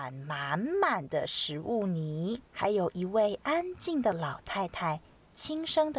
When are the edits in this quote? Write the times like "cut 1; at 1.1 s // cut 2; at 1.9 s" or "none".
cut 1; at 2.5 s

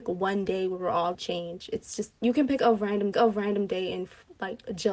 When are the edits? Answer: cut 1; at 1.1 s // cut 2; at 2.2 s // cut 3; at 3.1 s

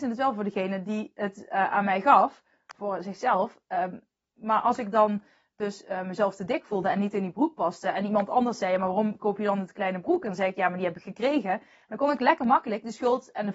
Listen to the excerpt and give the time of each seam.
none

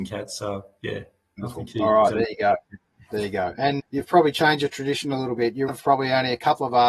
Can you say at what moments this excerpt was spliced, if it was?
cut 1; at 3.8 s // cut 2; at 5.7 s

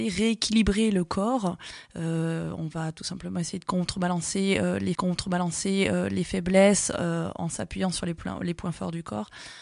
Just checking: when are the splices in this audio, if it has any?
cut 1; at 4.9 s

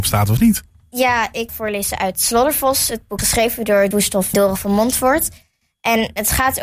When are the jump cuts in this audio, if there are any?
cut 1; at 1.5 s // cut 2; at 3.2 s // cut 3; at 3.9 s // cut 4; at 4.3 s

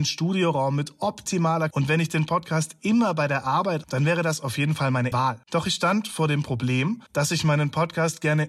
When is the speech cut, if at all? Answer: cut 1; at 1.7 s // cut 2; at 3.8 s // cut 3; at 5.1 s // cut 4; at 5.4 s // cut 5; at 7.1 s

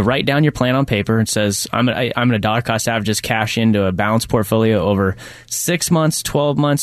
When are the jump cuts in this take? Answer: none

